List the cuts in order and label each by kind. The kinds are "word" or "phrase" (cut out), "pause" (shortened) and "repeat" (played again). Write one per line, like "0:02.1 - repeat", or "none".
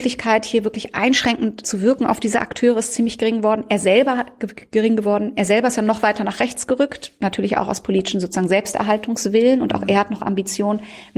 0:01.6 - word